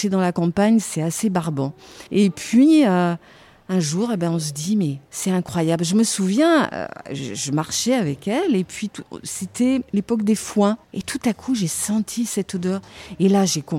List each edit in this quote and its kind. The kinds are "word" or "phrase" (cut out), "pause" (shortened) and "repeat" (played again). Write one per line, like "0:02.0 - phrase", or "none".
0:02.1 - pause
0:05.0 - pause
0:09.9 - pause
0:10.8 - pause